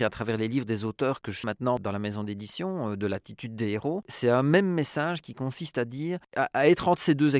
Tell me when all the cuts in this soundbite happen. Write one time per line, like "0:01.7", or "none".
0:01.4